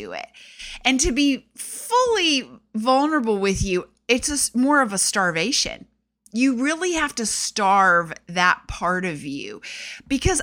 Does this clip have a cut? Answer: no; 0 cuts

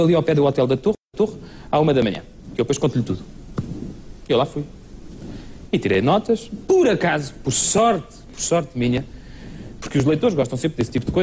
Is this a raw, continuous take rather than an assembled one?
yes; 0 cuts

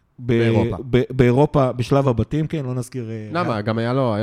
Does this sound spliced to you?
no; 0 cuts

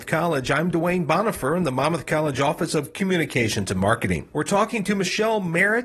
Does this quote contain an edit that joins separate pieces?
no; 0 cuts

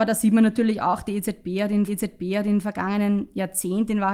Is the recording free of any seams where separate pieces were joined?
no; 1 cut; at 1.9 s

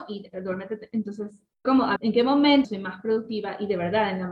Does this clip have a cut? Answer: yes; 3 cuts; at 1.6 s, 2.0 s, 2.6 s

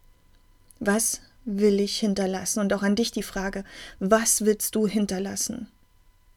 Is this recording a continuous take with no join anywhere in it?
yes; 0 cuts

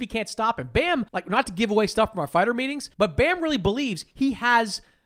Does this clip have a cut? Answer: yes; 2 cuts; at 1.1 s, 2.9 s

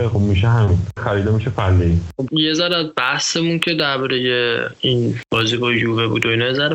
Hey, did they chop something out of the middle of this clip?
yes; 2 cuts; at 1.0 s, 2.3 s

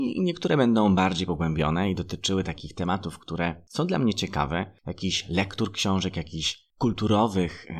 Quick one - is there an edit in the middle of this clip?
no; 0 cuts

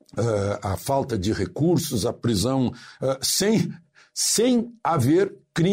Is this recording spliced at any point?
no; 0 cuts

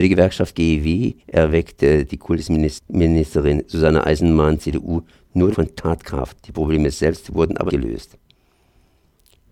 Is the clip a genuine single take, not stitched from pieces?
no; 3 cuts; at 1.2 s, 5.5 s, 7.7 s

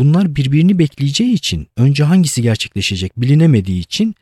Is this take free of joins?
yes; 0 cuts

